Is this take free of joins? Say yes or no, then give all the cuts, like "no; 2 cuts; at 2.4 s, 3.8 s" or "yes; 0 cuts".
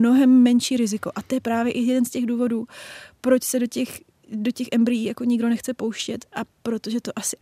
yes; 0 cuts